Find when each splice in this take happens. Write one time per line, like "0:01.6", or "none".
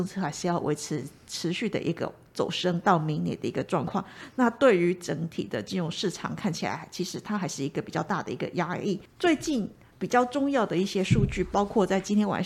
none